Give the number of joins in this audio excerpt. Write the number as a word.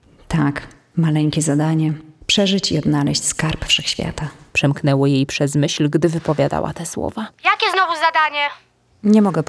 one